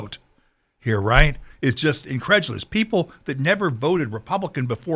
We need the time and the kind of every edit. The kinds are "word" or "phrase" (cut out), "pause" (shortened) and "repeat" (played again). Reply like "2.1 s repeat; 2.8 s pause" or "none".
none

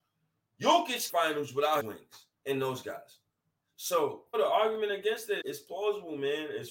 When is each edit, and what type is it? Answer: 1.1 s phrase; 1.8 s word; 2.4 s pause; 4.3 s word; 5.4 s word

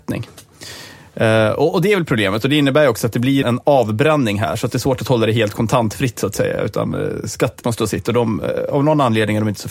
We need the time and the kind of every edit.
3.4 s word; 7.6 s word

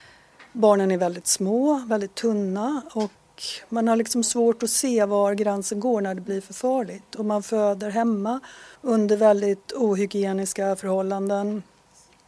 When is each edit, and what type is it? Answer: 8.8 s pause

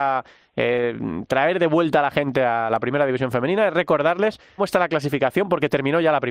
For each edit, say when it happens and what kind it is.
4.6 s phrase

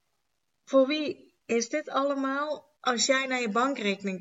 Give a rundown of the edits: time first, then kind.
1.4 s pause; 2.8 s pause

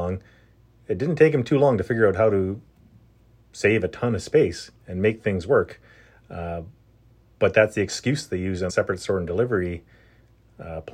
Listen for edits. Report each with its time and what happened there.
8.7 s word

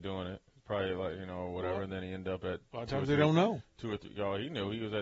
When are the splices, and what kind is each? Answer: none

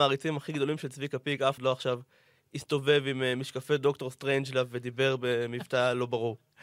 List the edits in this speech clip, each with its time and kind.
1.6 s word

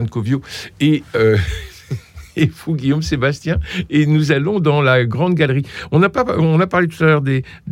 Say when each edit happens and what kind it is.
none

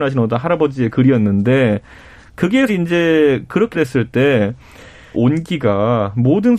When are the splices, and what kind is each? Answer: 2.7 s word; 3.7 s word; 5.1 s word

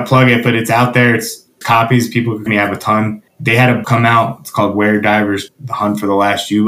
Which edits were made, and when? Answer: 1.6 s word; 2.5 s word; 3.3 s pause; 3.8 s word; 5.5 s word

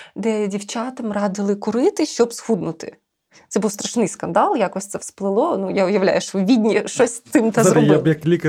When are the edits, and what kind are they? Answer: none

